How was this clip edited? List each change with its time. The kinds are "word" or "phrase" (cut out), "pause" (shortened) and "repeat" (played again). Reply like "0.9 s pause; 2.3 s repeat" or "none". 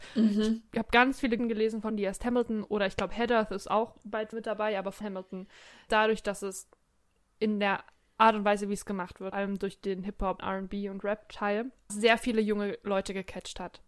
1.4 s word; 1.9 s word; 4.3 s word; 5.0 s word; 5.9 s word; 9.3 s word; 10.4 s word; 11.9 s word